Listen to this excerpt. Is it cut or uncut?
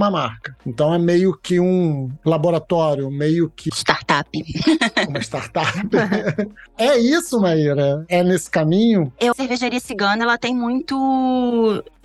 cut